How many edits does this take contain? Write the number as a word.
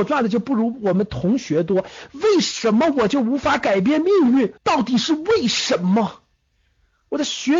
one